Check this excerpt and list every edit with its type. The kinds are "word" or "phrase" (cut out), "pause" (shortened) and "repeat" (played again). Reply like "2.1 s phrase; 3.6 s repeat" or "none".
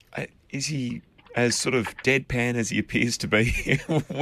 none